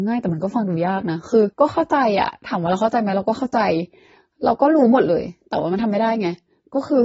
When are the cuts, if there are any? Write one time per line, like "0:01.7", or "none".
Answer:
0:01.5